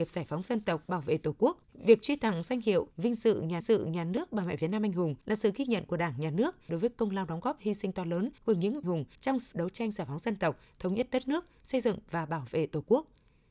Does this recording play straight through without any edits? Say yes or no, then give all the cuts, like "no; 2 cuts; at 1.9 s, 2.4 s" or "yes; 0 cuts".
no; 9 cuts; at 1.6 s, 2.9 s, 3.6 s, 5.2 s, 6.7 s, 8.4 s, 8.8 s, 9.1 s, 9.5 s